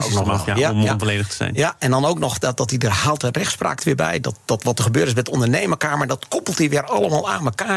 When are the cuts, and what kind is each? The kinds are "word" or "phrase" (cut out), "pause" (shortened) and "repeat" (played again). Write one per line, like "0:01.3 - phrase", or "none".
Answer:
none